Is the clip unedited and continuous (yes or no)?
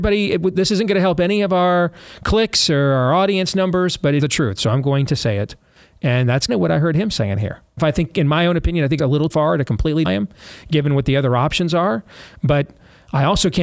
no